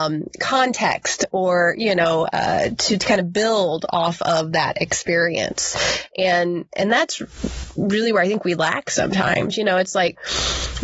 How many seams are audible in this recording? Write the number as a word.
zero